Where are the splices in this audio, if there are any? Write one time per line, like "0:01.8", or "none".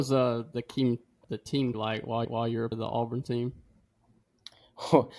0:01.2
0:01.7
0:02.2
0:02.7